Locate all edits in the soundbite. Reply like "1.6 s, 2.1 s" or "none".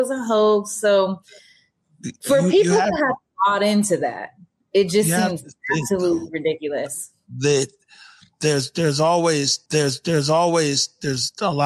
9.7 s